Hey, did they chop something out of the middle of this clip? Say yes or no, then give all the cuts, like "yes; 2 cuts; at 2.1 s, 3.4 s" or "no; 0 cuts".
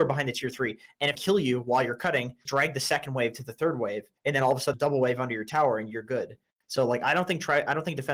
yes; 4 cuts; at 1.1 s, 2.5 s, 4.2 s, 4.7 s